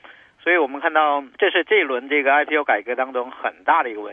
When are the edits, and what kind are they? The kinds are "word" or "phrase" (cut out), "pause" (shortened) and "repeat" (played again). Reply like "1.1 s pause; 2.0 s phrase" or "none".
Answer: 1.3 s pause

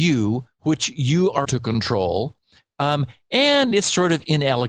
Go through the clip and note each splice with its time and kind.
1.4 s word

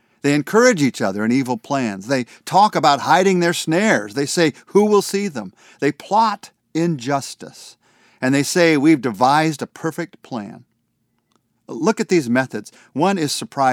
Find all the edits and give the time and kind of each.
none

